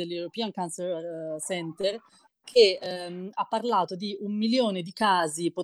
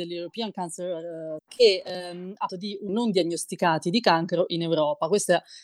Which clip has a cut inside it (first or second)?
second